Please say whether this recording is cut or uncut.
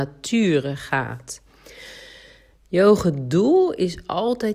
uncut